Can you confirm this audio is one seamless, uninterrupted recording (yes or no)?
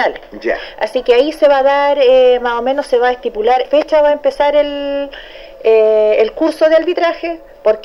no